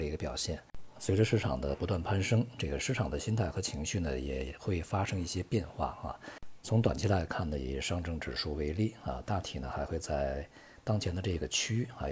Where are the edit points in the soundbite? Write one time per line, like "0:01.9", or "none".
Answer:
none

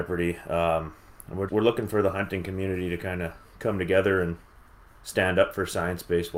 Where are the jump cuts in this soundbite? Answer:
0:01.5

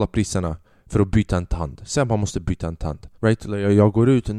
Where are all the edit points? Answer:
0:03.1

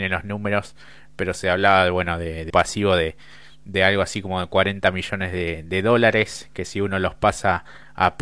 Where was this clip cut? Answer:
0:02.5

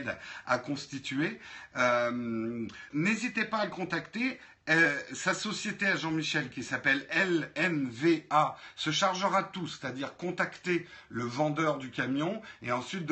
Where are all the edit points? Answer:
0:02.9

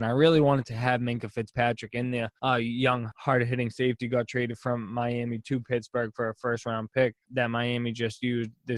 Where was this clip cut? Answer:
0:02.4
0:07.2

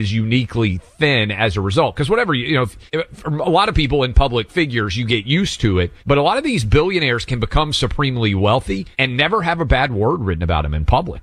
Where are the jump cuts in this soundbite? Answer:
0:02.9
0:06.0
0:08.9

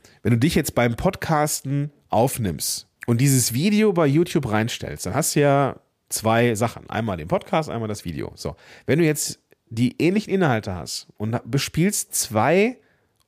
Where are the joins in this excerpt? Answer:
none

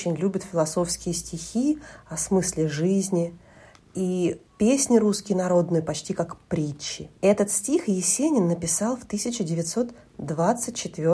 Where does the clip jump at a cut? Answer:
0:04.5
0:07.2

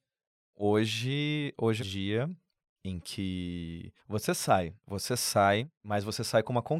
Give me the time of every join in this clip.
0:01.8
0:04.0

